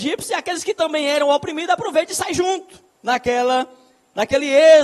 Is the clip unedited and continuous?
no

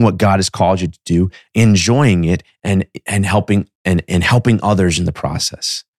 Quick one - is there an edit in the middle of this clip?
no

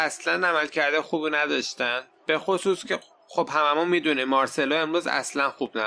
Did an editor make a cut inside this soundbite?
no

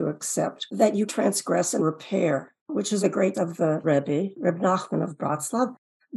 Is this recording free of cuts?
no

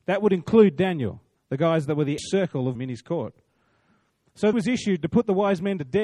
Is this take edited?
yes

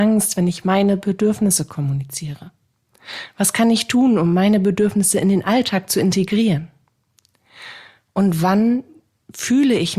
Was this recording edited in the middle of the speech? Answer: no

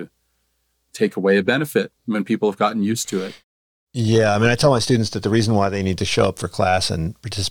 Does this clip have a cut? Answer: yes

